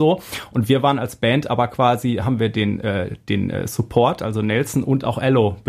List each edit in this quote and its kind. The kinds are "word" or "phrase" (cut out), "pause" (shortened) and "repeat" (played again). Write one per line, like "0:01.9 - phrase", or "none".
none